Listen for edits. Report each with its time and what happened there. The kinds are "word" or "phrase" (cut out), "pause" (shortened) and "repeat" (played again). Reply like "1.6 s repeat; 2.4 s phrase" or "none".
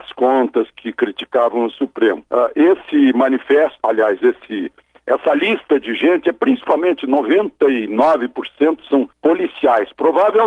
2.3 s pause; 9.1 s pause